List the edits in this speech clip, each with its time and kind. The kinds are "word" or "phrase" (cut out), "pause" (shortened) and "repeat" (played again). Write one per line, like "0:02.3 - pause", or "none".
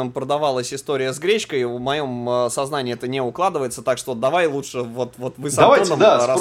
none